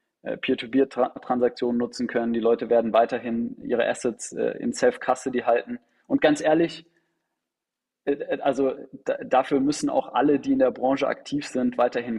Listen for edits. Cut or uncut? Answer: uncut